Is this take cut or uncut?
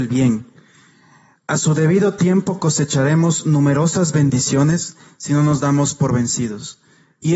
uncut